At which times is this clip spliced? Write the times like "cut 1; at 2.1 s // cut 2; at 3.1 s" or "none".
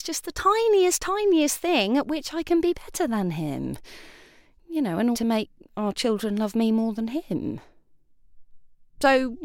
cut 1; at 5.1 s

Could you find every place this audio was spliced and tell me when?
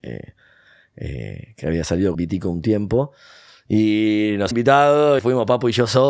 cut 1; at 2.1 s // cut 2; at 4.5 s // cut 3; at 5.2 s

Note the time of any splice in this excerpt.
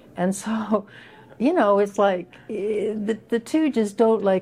none

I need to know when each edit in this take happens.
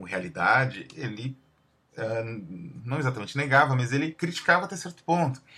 none

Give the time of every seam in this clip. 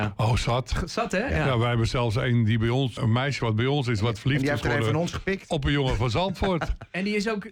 cut 1; at 3.0 s

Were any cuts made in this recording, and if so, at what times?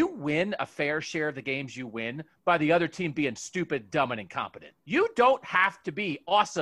cut 1; at 4.8 s

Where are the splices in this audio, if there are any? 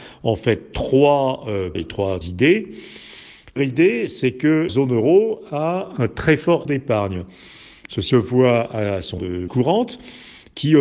cut 1; at 1.7 s // cut 2; at 2.2 s // cut 3; at 3.6 s // cut 4; at 4.7 s // cut 5; at 6.6 s // cut 6; at 8.1 s // cut 7; at 9.2 s // cut 8; at 9.5 s

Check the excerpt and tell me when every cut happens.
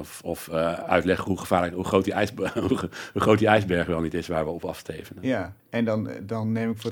cut 1; at 5.6 s

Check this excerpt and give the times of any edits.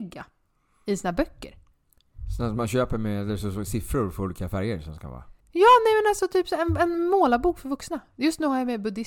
cut 1; at 5.4 s

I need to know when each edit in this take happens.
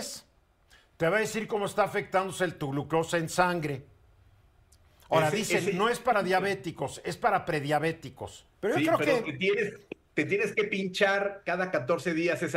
cut 1; at 8.5 s

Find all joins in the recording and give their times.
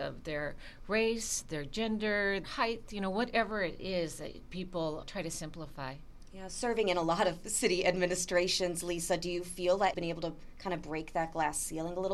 cut 1; at 2.4 s // cut 2; at 5.0 s // cut 3; at 9.9 s

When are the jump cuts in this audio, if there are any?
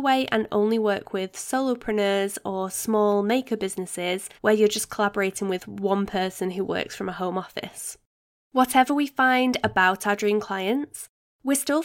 cut 1; at 4.4 s

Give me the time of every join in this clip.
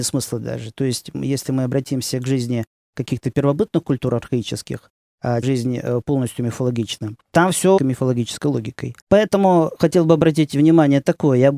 cut 1; at 5.4 s // cut 2; at 7.2 s // cut 3; at 7.8 s // cut 4; at 9.0 s

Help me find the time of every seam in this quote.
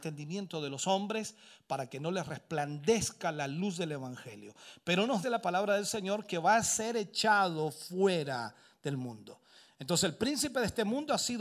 cut 1; at 5.2 s

